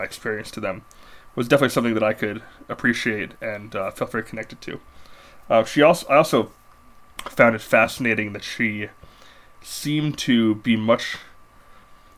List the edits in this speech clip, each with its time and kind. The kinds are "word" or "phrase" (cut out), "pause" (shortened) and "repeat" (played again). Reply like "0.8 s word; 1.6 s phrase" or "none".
none